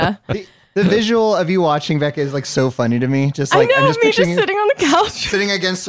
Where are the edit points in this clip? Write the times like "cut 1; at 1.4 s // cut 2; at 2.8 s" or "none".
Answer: none